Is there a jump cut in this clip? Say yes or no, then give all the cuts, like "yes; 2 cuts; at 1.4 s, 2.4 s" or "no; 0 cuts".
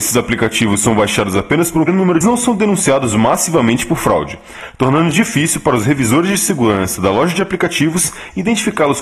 yes; 2 cuts; at 1.9 s, 2.2 s